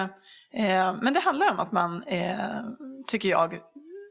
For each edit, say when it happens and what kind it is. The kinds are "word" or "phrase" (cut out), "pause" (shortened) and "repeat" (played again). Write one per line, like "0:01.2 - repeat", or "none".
none